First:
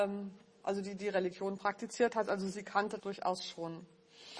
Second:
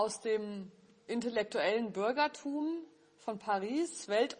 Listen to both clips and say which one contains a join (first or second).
first